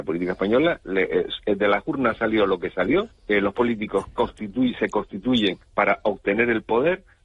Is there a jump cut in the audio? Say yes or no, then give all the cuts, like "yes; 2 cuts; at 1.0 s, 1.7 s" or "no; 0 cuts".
yes; 3 cuts; at 3.1 s, 3.5 s, 5.6 s